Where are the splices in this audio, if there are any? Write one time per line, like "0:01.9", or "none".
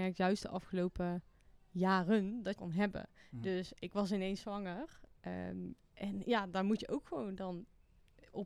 0:02.6